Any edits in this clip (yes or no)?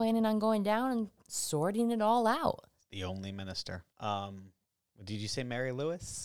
yes